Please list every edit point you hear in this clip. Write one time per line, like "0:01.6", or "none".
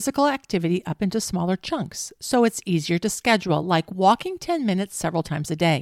none